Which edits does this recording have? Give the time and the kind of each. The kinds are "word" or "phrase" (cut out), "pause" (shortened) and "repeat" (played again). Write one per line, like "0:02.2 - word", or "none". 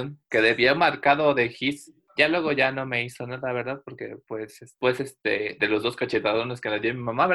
none